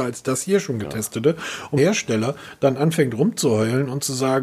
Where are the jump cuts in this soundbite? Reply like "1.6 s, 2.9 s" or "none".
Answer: 1.8 s